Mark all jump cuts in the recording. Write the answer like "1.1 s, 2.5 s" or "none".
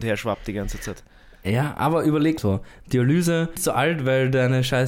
2.4 s, 3.6 s